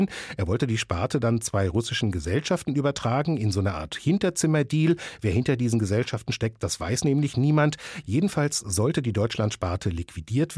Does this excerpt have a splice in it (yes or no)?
no